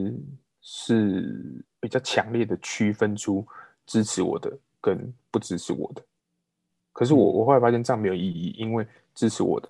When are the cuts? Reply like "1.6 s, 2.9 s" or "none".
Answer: 1.7 s